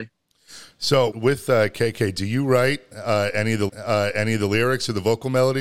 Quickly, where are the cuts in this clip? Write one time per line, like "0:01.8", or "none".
0:01.1
0:03.7